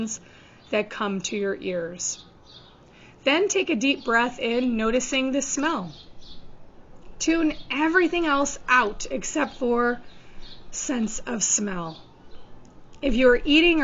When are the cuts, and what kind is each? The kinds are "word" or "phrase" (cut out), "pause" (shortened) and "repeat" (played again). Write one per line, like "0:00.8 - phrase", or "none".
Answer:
none